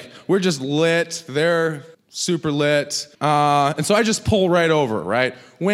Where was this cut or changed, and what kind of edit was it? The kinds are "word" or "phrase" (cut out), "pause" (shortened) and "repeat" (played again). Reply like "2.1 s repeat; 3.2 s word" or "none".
1.9 s pause; 3.1 s pause